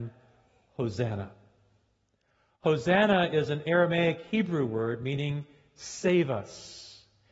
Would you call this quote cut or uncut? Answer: uncut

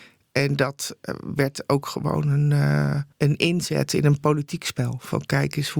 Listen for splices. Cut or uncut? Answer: cut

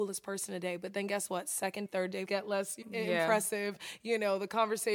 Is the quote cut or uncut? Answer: cut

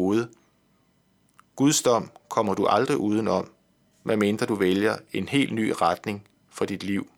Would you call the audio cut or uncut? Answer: uncut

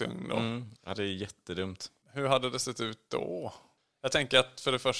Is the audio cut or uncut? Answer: uncut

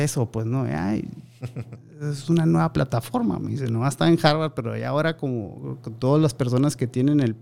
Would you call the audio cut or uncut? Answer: uncut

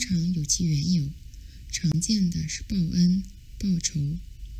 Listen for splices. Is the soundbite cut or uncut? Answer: uncut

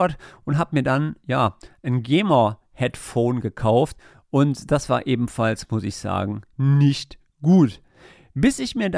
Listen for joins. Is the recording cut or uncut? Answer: uncut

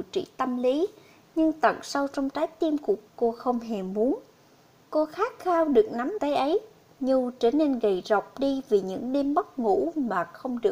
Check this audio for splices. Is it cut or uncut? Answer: cut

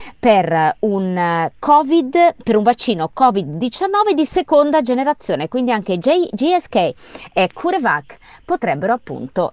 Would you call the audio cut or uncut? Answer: uncut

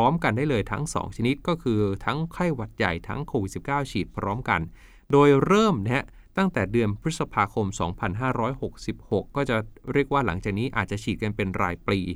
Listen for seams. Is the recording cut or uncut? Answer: uncut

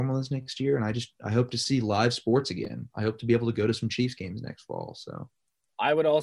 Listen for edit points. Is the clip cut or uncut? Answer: uncut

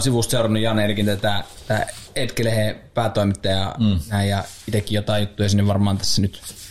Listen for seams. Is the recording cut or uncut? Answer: uncut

